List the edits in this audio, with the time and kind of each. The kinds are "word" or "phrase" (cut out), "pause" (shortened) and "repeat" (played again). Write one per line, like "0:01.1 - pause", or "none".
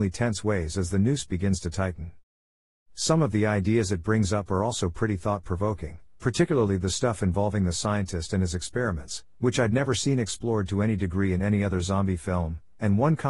none